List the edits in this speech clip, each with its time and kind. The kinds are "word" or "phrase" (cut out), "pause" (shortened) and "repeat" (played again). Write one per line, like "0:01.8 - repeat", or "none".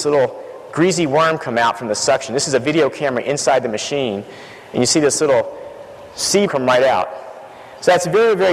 0:06.5 - word

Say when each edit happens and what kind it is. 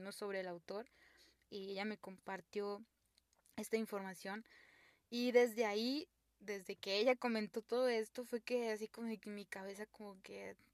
none

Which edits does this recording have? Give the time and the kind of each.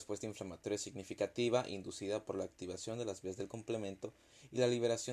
none

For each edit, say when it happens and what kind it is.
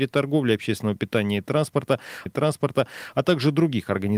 0:02.3 - repeat

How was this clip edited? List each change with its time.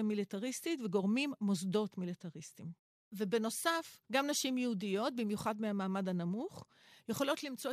0:04.0 - pause

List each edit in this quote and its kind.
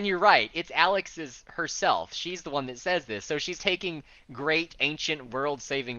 0:03.6 - word

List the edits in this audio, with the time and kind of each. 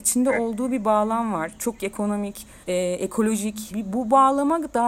0:01.8 - word
0:02.6 - pause
0:03.7 - word

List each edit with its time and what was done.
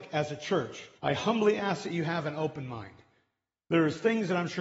0:01.0 - pause

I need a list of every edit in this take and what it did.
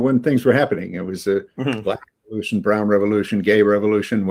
0:01.5 - pause

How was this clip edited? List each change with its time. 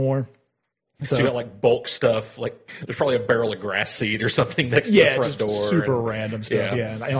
none

